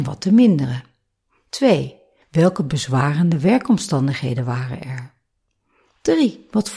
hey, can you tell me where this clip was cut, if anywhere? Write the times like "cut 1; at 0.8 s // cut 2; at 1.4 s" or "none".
none